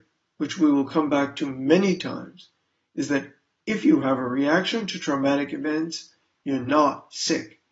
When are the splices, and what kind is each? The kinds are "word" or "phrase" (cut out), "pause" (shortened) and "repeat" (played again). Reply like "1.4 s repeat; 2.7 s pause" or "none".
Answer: none